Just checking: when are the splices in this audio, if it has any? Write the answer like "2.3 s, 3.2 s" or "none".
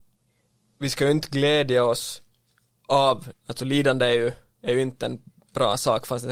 3.3 s